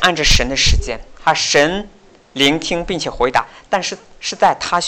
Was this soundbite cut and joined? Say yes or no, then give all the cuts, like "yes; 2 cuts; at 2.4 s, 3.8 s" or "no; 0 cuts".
no; 0 cuts